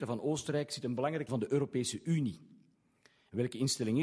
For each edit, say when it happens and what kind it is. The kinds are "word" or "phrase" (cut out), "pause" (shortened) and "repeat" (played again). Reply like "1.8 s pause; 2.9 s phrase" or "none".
1.3 s word